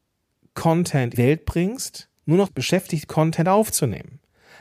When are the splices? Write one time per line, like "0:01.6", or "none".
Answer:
0:01.1
0:02.2
0:02.5
0:03.1